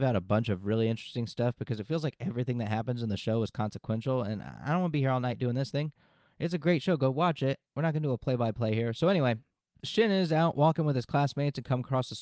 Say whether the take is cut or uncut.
cut